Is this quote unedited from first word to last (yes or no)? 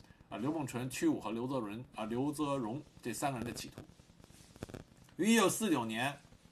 yes